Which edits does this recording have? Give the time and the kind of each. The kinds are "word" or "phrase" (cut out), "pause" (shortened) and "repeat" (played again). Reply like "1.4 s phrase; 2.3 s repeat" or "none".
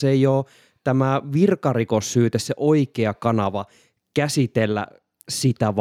none